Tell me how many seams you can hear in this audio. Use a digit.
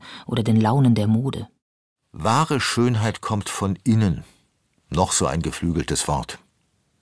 0